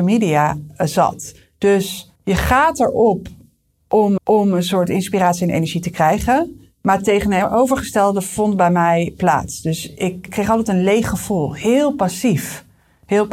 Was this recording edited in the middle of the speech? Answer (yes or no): yes